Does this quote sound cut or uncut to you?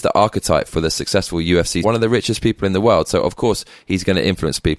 cut